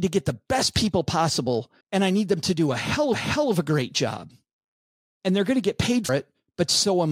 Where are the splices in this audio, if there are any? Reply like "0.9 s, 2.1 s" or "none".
1.8 s, 3.1 s, 6.1 s